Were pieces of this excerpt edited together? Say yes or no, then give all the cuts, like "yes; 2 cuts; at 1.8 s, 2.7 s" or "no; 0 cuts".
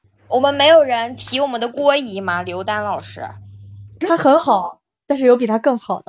no; 0 cuts